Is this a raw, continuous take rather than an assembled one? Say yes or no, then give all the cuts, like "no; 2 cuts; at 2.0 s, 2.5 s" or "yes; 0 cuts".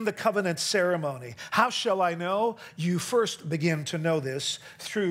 yes; 0 cuts